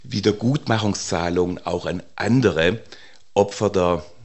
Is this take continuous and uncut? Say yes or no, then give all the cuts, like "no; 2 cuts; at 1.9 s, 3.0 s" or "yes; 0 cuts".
yes; 0 cuts